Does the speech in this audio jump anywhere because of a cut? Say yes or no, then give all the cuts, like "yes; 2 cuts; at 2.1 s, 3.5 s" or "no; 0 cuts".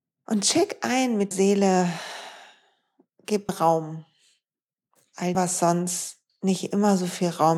yes; 3 cuts; at 1.3 s, 3.5 s, 5.3 s